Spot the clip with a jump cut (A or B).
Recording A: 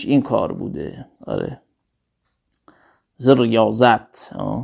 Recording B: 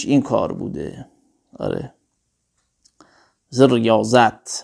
A